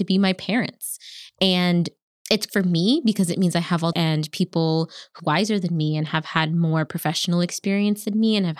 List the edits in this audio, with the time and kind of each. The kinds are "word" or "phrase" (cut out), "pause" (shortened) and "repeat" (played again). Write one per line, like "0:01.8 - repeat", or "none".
0:02.5 - word
0:03.9 - phrase
0:05.2 - phrase

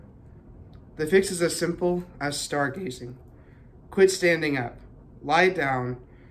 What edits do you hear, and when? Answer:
none

